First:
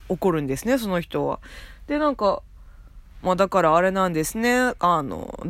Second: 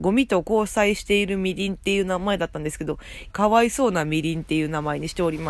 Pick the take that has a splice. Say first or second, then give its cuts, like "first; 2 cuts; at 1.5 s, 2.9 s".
second; 1 cut; at 3.3 s